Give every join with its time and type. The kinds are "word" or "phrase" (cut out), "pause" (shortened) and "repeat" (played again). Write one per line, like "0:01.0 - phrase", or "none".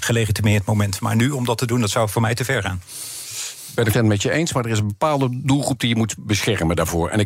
0:03.9 - word